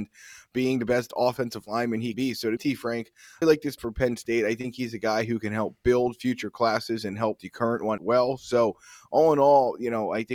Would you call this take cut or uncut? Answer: cut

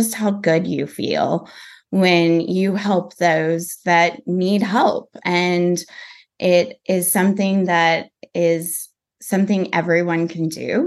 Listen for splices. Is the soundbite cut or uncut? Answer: uncut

